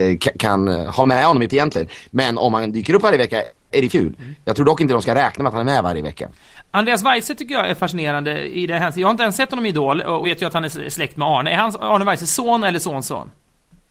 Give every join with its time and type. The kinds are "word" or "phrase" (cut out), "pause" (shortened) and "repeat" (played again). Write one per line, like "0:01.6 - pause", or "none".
0:01.5 - word
0:03.9 - word
0:10.2 - word

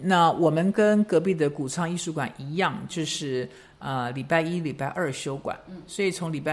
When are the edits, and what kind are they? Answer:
none

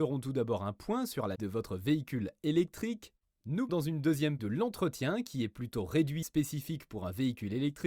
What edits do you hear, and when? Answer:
0:01.3 - word
0:03.7 - word
0:04.4 - word
0:06.2 - word

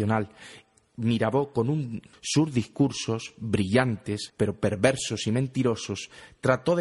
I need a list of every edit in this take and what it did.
0:02.1 - word
0:04.3 - word

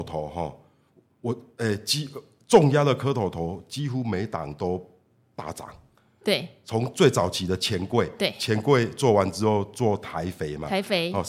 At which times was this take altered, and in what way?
none

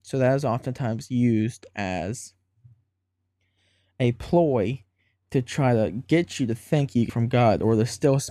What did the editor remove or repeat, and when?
0:07.1 - word

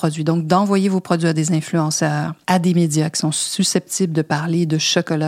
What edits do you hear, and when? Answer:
0:02.4 - pause

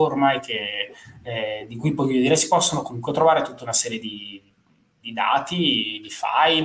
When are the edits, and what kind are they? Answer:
none

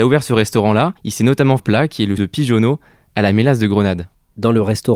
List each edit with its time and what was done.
0:01.0 - pause
0:01.6 - phrase
0:02.2 - word

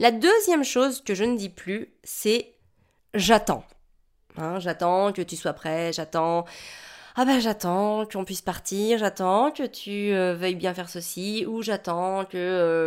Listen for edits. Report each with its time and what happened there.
none

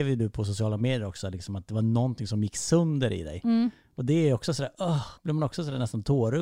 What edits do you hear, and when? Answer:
0:05.2 - pause

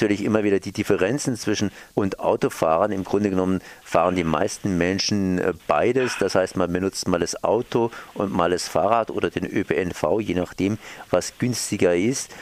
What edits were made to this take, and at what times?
0:01.9 - word

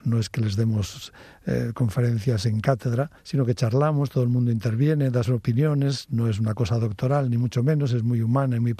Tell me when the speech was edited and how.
0:03.2 - pause
0:05.2 - word

